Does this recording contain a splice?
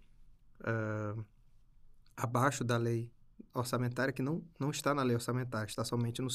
no; 0 cuts

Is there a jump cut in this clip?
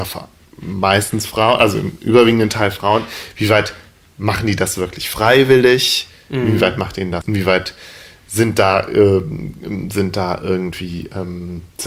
yes; 1 cut; at 7.2 s

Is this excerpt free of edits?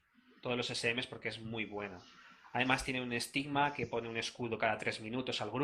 yes; 0 cuts

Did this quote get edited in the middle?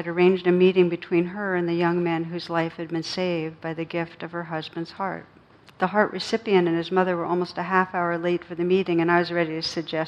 yes; 1 cut; at 5.5 s

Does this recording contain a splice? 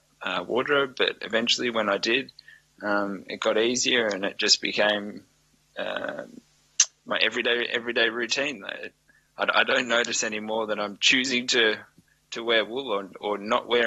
no; 0 cuts

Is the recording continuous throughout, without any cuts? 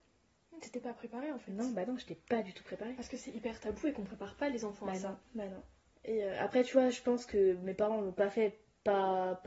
yes; 0 cuts

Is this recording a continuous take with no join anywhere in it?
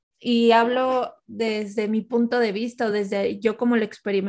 yes; 0 cuts

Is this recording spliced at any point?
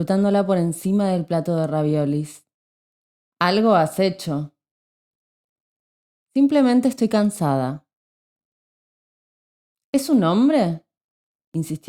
no; 0 cuts

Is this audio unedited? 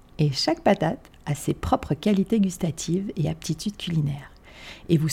yes; 0 cuts

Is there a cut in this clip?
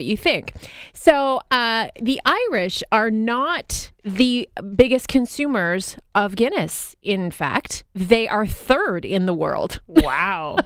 yes; 2 cuts; at 3.9 s, 7.9 s

